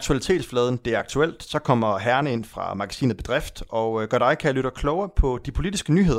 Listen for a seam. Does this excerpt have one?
no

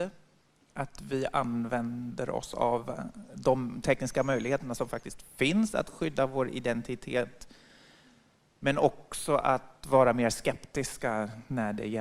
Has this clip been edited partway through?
no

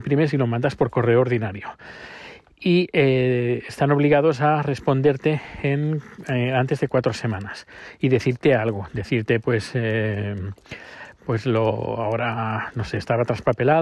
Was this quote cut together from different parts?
no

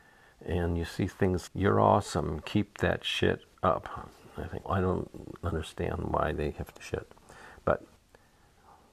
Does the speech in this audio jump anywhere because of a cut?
yes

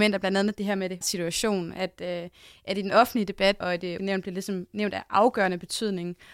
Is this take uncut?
no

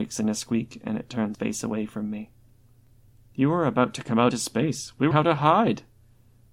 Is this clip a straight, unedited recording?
no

